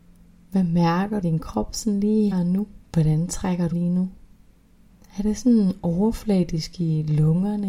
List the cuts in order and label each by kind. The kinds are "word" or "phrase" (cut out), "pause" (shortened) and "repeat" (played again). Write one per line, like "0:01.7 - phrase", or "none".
0:01.2 - phrase
0:02.3 - word
0:02.8 - pause
0:03.7 - word
0:04.9 - pause